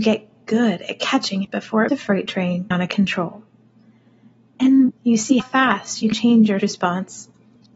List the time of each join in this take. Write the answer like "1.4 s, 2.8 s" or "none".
1.4 s, 1.9 s, 2.7 s, 4.9 s, 5.4 s, 6.1 s, 6.6 s